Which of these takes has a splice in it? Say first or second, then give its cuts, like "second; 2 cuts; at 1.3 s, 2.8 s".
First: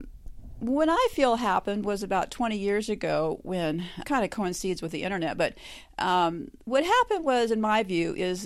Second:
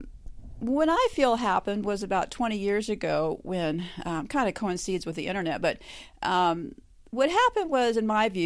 first; 2 cuts; at 4.0 s, 6.6 s